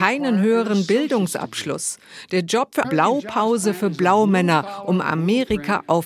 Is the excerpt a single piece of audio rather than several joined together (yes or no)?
no